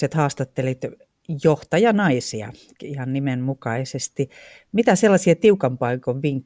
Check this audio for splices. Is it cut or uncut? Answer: uncut